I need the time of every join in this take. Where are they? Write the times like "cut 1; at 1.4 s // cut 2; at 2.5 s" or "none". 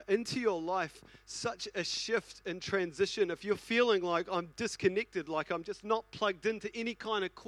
none